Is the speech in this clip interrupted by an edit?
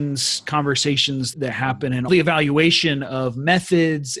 yes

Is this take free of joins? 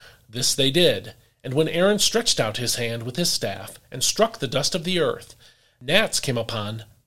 yes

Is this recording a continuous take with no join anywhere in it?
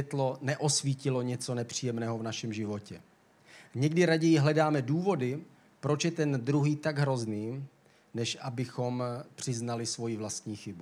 yes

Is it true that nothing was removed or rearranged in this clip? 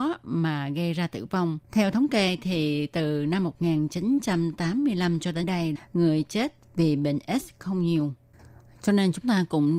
no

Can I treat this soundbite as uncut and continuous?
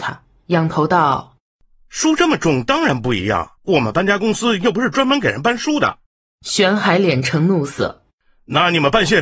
no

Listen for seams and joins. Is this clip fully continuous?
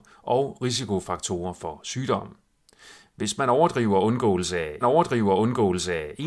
no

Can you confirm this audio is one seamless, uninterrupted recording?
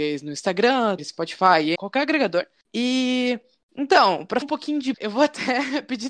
no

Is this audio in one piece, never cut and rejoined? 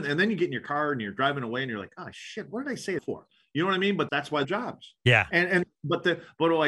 no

